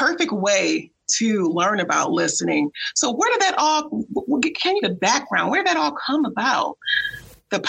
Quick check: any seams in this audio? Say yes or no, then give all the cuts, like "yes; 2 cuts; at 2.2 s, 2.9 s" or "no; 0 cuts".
yes; 1 cut; at 4.8 s